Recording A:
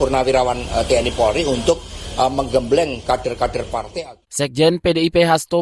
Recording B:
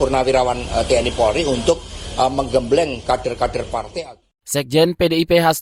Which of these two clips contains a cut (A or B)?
A